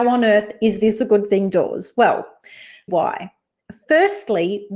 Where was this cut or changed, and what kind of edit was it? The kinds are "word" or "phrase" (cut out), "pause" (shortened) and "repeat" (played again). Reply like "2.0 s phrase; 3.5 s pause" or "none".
2.9 s phrase